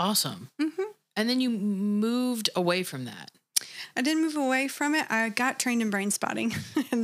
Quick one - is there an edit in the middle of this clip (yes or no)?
no